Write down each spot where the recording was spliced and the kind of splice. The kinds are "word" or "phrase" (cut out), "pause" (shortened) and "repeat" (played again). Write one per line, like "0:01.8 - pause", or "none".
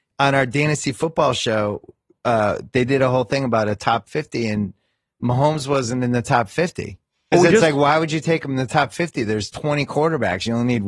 0:07.3 - word

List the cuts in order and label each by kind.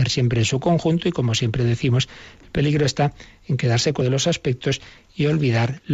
0:04.0 - word

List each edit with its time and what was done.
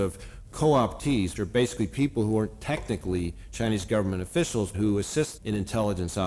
0:01.4 - word
0:04.7 - word
0:05.4 - word

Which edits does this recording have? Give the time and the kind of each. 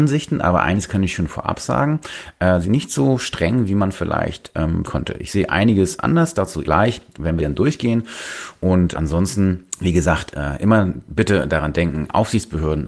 0:02.6 - word
0:04.9 - word
0:06.6 - word
0:07.4 - phrase
0:08.9 - word
0:09.7 - pause

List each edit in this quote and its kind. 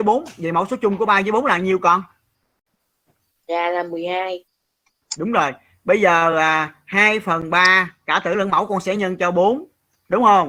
none

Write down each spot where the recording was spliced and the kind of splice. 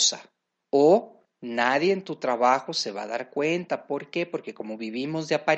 none

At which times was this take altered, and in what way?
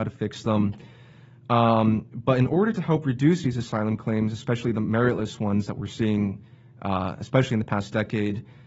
none

